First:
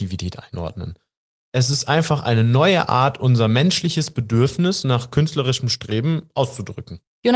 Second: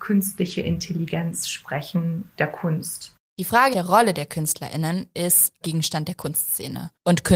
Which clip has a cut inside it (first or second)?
second